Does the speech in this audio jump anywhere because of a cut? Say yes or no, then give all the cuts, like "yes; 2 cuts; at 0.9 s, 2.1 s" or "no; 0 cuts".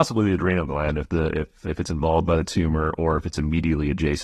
no; 0 cuts